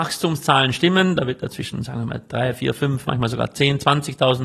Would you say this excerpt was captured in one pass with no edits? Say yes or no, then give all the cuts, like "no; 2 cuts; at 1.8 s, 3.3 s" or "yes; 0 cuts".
yes; 0 cuts